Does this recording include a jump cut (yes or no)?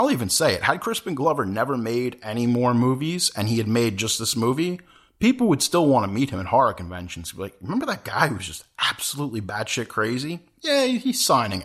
no